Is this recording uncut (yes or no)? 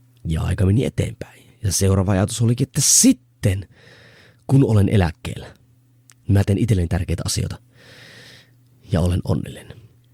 yes